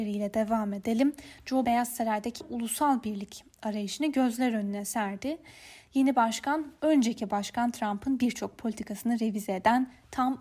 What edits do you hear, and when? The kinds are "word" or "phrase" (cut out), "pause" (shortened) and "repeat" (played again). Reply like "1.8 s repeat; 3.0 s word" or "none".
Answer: 1.6 s word; 2.4 s phrase